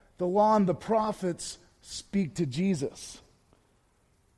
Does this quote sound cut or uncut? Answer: uncut